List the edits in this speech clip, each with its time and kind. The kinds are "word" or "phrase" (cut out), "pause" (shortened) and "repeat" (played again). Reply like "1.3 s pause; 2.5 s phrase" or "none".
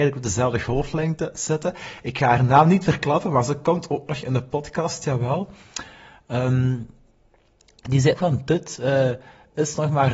8.1 s word